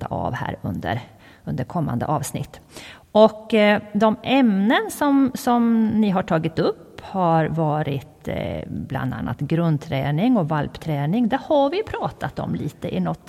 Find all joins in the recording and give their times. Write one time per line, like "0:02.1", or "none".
none